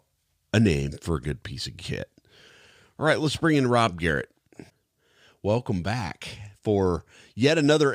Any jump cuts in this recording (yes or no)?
no